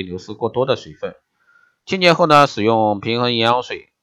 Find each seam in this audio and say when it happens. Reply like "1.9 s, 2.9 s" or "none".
none